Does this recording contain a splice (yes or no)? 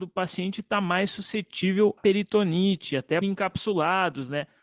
yes